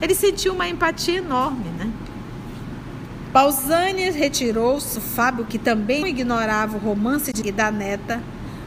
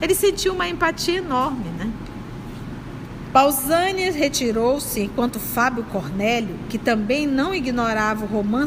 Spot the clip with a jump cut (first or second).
first